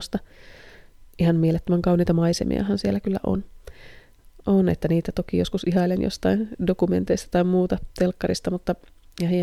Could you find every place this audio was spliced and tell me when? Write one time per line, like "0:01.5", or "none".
none